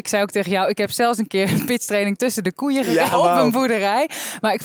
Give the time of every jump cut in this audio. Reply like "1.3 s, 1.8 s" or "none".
3.1 s